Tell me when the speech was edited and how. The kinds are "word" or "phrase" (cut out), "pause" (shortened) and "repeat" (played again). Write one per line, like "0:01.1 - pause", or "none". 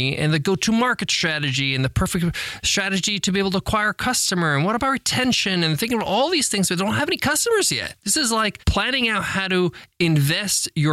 none